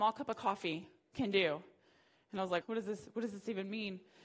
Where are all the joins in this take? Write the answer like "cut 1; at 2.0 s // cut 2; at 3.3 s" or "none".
cut 1; at 2.6 s